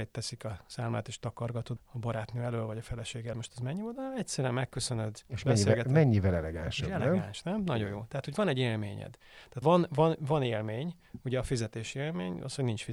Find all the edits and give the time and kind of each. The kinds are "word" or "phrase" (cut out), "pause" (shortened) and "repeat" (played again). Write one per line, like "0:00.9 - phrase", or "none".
0:01.8 - word
0:03.3 - word
0:09.6 - word